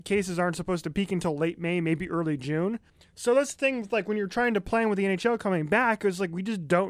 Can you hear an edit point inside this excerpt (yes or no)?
yes